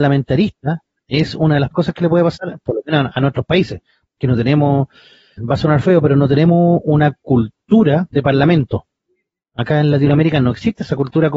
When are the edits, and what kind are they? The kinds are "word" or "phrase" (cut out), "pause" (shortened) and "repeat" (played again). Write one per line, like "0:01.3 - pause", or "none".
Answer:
0:01.7 - word
0:04.2 - word
0:05.4 - word
0:08.1 - word